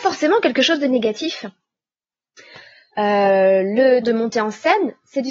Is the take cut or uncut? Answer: cut